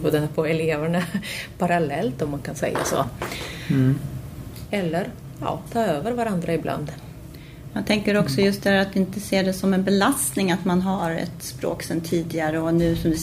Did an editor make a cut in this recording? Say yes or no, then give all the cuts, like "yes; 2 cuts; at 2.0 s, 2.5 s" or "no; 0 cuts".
no; 0 cuts